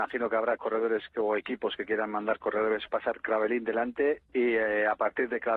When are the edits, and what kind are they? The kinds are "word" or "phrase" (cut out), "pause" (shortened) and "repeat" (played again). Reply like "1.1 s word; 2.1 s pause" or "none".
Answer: 2.9 s phrase